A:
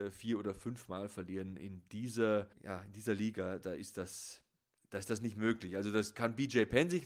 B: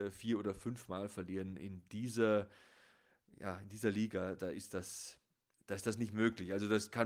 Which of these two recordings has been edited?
A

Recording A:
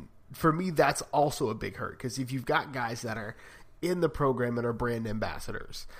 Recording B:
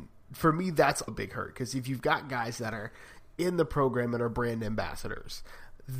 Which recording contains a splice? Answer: B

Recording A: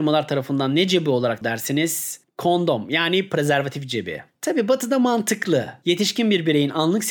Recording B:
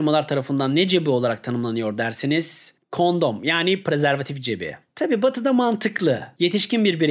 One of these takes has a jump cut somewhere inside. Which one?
A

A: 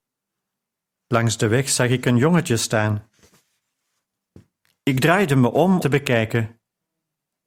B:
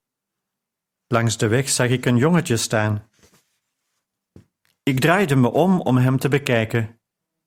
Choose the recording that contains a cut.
A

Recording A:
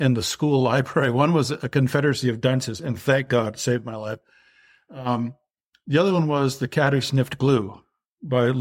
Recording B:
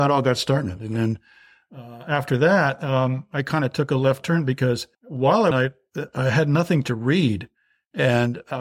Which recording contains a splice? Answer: B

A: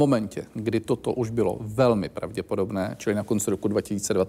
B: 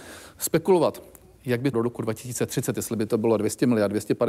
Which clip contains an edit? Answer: B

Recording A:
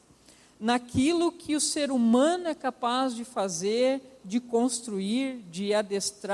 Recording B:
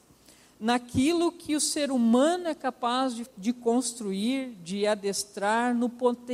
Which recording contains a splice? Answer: B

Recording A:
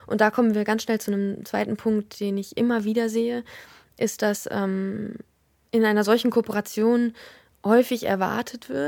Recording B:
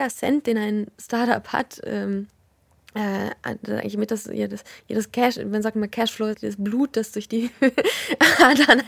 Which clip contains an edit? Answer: B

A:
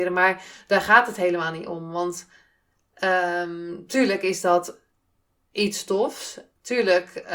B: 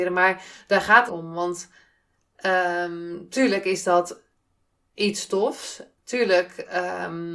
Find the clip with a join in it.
B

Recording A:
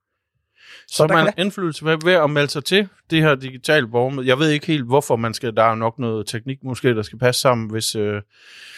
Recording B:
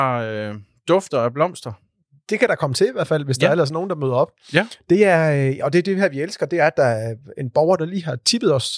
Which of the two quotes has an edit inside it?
A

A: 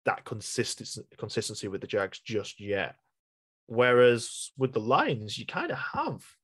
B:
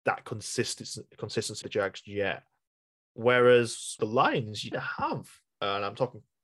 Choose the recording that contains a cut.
B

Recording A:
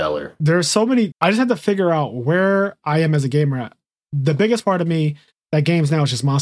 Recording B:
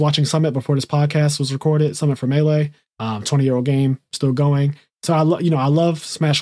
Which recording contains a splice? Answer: A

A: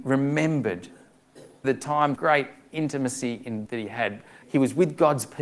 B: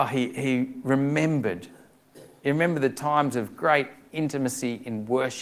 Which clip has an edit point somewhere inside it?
A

